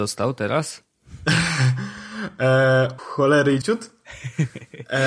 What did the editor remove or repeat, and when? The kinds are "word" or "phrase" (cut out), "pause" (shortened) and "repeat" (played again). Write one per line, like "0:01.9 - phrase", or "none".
0:03.0 - word
0:03.6 - word